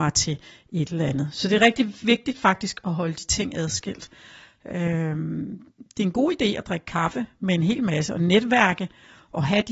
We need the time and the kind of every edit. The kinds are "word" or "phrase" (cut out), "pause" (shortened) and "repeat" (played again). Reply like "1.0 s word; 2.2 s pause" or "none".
none